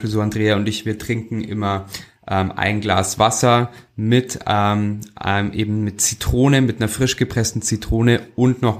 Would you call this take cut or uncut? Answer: uncut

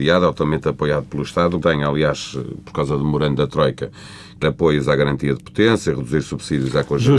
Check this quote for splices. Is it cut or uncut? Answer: cut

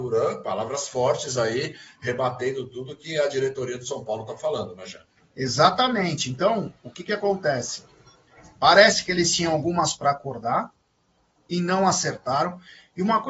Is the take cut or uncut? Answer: cut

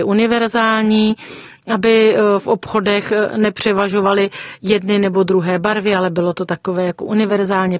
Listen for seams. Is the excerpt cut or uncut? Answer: uncut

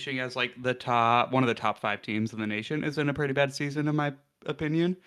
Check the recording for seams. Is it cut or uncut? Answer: uncut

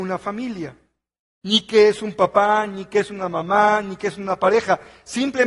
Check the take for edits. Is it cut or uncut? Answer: uncut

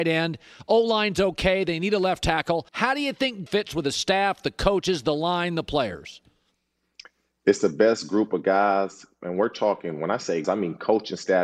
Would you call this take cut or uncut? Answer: cut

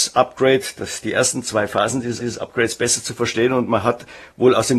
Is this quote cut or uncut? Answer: cut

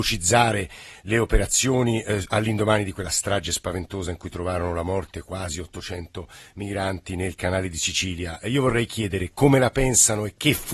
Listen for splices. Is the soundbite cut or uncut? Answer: uncut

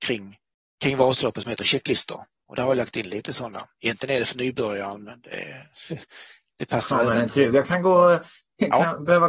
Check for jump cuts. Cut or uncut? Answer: uncut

